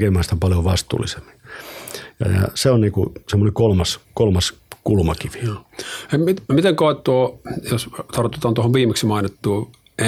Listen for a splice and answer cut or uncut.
cut